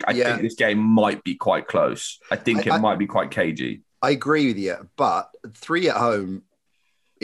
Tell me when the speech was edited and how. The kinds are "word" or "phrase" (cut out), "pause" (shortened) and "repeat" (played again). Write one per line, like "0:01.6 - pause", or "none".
0:05.4 - pause